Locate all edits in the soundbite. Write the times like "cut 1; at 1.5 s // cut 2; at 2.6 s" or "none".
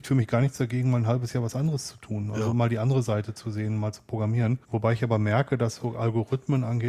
cut 1; at 4.6 s // cut 2; at 5.8 s